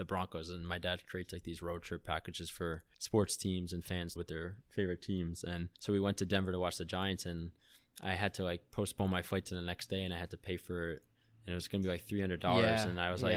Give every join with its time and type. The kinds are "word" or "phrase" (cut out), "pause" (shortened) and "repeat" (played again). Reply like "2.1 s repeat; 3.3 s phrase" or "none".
2.9 s pause; 4.2 s phrase; 5.7 s pause